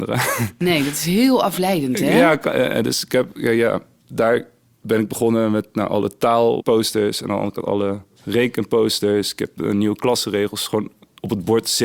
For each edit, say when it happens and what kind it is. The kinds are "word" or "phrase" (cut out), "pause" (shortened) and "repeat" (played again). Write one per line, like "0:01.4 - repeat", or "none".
none